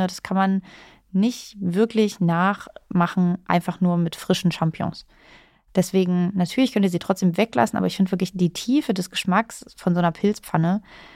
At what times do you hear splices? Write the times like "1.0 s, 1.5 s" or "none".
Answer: none